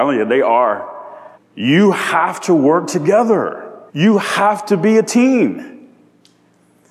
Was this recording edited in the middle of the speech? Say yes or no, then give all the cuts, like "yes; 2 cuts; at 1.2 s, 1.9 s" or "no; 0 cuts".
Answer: yes; 2 cuts; at 1.3 s, 3.9 s